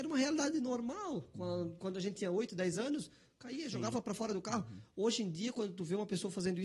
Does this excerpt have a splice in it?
no; 0 cuts

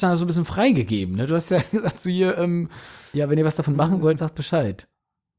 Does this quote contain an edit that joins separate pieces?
no; 0 cuts

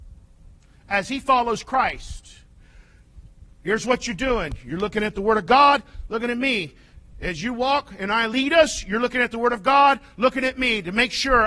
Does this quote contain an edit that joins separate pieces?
no; 0 cuts

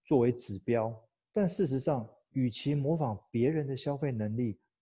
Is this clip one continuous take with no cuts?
no; 1 cut; at 1.2 s

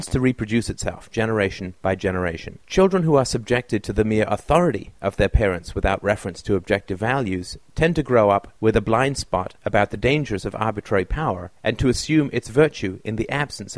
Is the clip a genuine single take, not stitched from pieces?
no; 6 cuts; at 1.8 s, 2.6 s, 5.0 s, 8.6 s, 9.6 s, 11.6 s

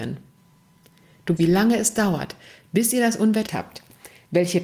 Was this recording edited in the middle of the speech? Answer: yes; 2 cuts; at 1.4 s, 3.5 s

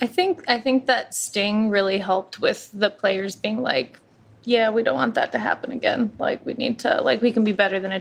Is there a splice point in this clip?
no; 0 cuts

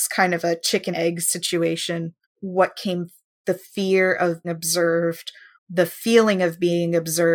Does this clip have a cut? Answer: yes; 5 cuts; at 0.9 s, 2.2 s, 3.4 s, 4.4 s, 5.5 s

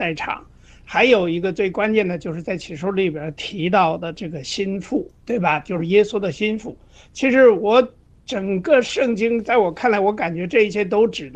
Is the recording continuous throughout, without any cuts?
yes; 0 cuts

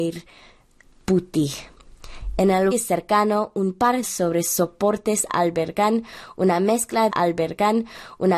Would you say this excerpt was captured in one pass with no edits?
no; 3 cuts; at 2.7 s, 4.0 s, 7.1 s

